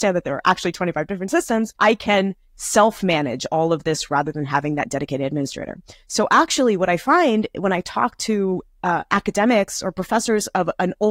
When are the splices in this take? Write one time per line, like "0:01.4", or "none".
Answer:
0:01.8